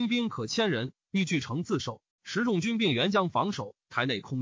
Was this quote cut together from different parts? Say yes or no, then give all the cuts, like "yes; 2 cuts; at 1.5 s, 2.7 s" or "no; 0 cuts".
yes; 1 cut; at 2.1 s